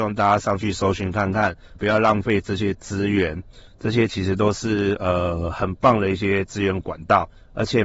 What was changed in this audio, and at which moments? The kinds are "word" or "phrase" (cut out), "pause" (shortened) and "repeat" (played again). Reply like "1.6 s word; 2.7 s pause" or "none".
1.8 s word